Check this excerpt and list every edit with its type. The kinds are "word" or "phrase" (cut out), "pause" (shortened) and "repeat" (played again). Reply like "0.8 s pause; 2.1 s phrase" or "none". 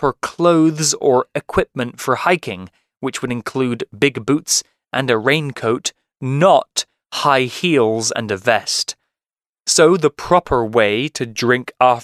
none